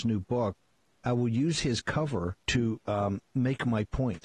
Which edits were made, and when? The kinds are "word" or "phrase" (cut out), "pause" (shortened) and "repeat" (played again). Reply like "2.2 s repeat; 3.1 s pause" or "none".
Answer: 2.4 s pause